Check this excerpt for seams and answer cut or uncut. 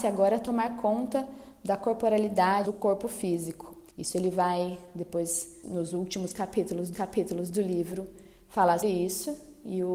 cut